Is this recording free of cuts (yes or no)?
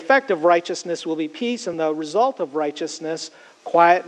yes